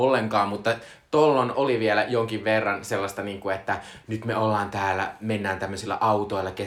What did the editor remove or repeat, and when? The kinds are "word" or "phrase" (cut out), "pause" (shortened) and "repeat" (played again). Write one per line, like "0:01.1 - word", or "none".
0:01.5 - word